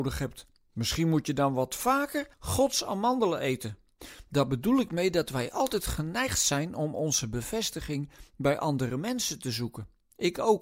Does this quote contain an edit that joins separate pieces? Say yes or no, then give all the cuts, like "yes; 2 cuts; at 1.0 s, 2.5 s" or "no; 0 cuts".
yes; 1 cut; at 2.3 s